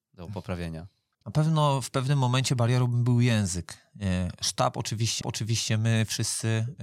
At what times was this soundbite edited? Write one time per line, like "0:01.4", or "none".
0:01.8
0:05.2